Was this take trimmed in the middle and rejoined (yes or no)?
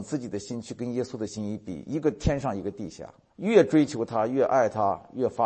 yes